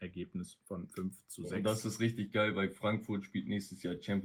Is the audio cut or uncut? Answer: uncut